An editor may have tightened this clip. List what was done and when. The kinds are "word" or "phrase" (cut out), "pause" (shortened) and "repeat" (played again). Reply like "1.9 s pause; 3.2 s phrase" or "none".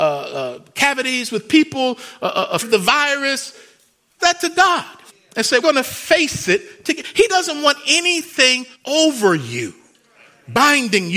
2.6 s word; 4.2 s word; 5.1 s pause; 5.6 s word; 8.7 s pause